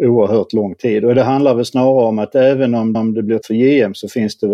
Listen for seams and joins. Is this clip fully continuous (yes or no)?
no